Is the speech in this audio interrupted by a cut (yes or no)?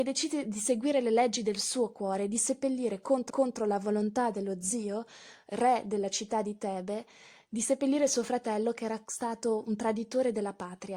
yes